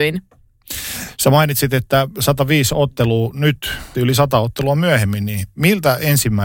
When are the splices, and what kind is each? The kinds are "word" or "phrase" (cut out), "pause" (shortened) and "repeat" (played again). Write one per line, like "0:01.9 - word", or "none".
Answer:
0:03.9 - word